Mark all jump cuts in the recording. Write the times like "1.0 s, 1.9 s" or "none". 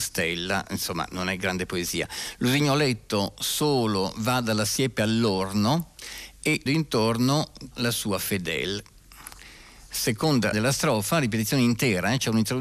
6.7 s, 7.7 s, 10.5 s